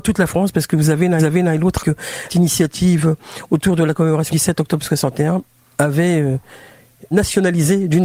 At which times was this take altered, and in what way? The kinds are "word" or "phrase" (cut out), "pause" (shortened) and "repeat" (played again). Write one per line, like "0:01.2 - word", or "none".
0:01.2 - repeat
0:01.8 - word
0:02.3 - word
0:04.3 - word
0:07.1 - word